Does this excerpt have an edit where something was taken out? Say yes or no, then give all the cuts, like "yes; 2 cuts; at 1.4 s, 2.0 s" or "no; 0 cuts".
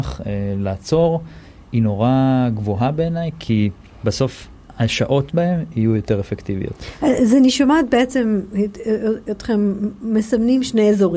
yes; 2 cuts; at 3.9 s, 5.3 s